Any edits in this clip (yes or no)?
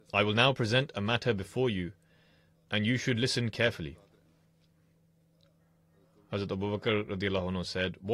no